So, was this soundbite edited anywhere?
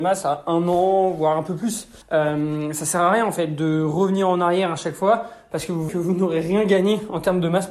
yes; 2 cuts; at 2.0 s, 5.9 s

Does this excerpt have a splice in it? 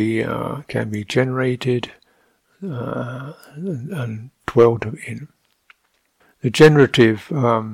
no; 0 cuts

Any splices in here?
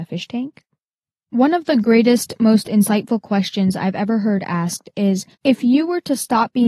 yes; 1 cut; at 5.3 s

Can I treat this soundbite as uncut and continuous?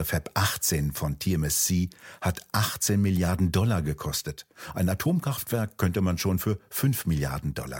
yes; 0 cuts

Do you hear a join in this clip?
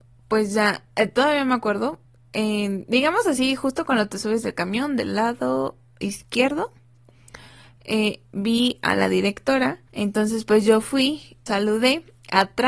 yes; 3 cuts; at 2.0 s, 9.9 s, 11.5 s

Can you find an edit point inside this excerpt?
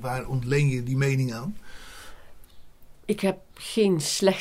no; 0 cuts

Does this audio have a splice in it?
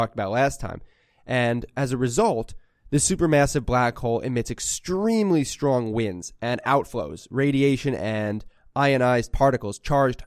no; 0 cuts

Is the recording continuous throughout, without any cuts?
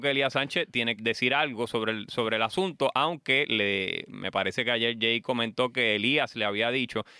no; 1 cut; at 1.0 s

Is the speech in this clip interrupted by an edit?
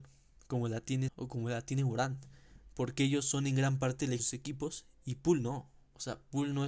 yes; 2 cuts; at 1.1 s, 4.2 s

